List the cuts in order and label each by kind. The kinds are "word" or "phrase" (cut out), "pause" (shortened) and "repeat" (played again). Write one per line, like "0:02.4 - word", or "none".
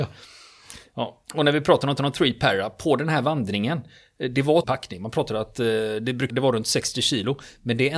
0:01.2 - pause
0:02.0 - repeat
0:04.6 - word
0:06.3 - word